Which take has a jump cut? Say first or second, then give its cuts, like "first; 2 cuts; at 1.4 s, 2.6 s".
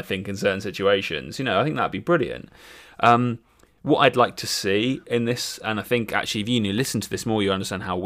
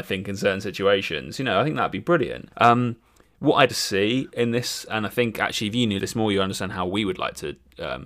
second; 3 cuts; at 2.5 s, 3.7 s, 6.0 s